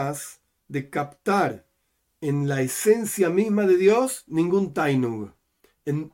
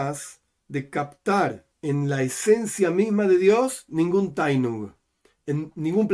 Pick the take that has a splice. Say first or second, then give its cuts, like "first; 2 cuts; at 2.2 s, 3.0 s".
second; 1 cut; at 1.7 s